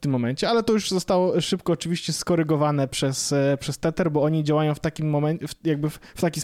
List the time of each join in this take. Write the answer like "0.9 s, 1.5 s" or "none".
none